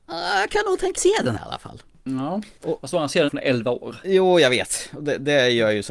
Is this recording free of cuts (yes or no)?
no